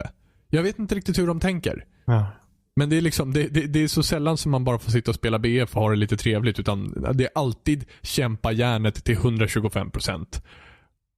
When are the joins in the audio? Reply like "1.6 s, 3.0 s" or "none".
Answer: none